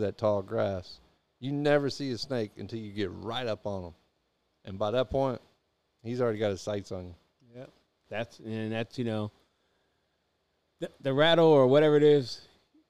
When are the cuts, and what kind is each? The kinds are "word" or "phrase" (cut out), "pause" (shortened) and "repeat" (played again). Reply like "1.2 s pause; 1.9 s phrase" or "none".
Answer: none